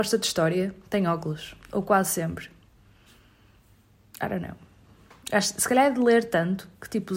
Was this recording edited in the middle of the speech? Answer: no; 0 cuts

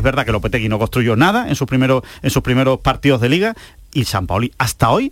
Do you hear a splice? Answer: no; 0 cuts

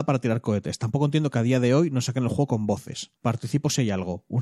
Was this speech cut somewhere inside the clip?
yes; 1 cut; at 3.2 s

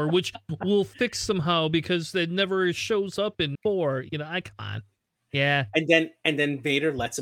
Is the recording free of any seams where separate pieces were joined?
no; 1 cut; at 3.6 s

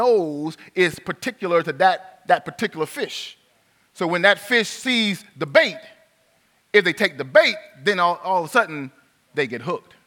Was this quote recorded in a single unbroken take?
yes; 0 cuts

